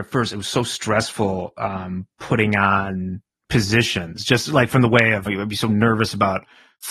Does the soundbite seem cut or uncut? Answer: cut